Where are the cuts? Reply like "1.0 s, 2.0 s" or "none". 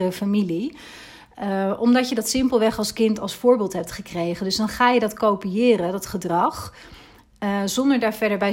none